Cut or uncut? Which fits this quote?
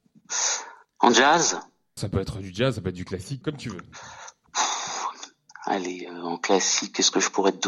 cut